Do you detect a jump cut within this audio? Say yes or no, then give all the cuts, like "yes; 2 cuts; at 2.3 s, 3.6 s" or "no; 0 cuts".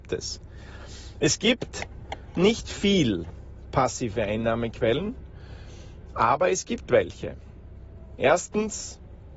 no; 0 cuts